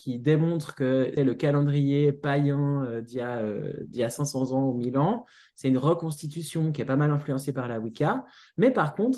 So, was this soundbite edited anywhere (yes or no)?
yes